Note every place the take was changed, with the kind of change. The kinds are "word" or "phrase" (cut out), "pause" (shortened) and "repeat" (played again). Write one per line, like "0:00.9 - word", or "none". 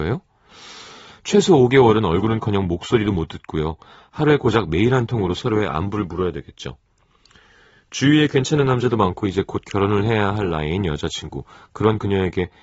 none